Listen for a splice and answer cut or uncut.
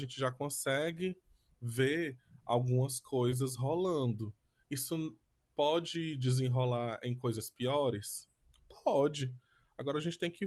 uncut